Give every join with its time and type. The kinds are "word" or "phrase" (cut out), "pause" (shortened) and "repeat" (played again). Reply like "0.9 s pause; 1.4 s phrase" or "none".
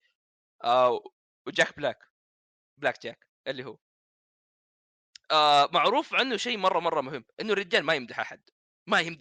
none